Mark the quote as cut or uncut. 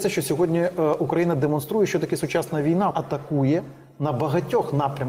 cut